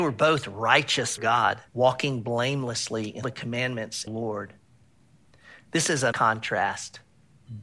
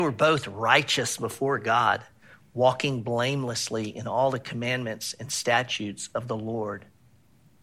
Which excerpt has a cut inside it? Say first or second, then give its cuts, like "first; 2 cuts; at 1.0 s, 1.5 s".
first; 5 cuts; at 1.2 s, 1.7 s, 3.2 s, 4.1 s, 6.1 s